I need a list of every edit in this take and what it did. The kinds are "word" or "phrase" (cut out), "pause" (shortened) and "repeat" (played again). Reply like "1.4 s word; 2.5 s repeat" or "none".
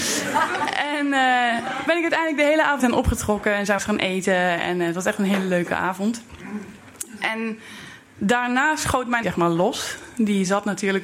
1.9 s word; 2.8 s word; 3.8 s word; 9.2 s word